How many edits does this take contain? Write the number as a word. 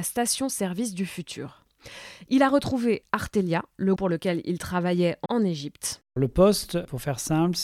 two